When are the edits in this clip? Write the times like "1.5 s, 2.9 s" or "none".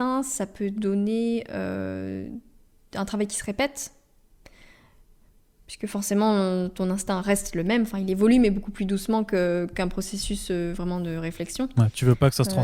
none